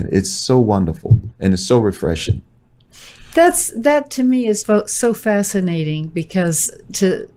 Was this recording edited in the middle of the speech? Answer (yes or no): yes